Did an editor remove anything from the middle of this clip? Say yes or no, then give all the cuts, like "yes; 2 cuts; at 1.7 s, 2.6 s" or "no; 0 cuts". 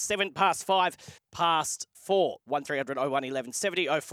yes; 2 cuts; at 1.2 s, 1.9 s